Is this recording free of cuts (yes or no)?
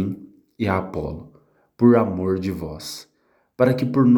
yes